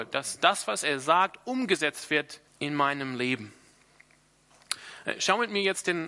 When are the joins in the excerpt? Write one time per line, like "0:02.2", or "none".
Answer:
0:02.5